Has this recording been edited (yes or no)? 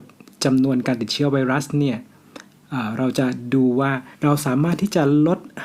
yes